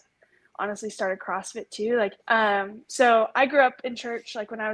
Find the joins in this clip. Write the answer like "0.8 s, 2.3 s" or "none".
2.2 s